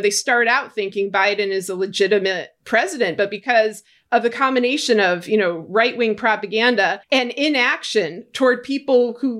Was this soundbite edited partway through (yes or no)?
yes